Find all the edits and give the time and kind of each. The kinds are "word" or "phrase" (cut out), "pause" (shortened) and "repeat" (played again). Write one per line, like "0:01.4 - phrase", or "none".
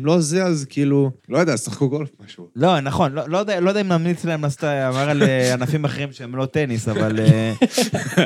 0:01.2 - pause